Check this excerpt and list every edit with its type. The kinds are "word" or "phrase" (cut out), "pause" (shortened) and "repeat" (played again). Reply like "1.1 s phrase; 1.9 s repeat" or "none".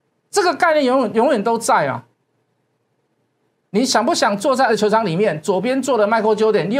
4.7 s word